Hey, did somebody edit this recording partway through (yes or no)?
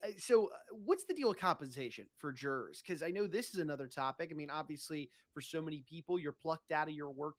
no